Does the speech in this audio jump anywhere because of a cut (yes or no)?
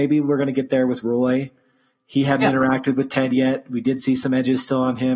no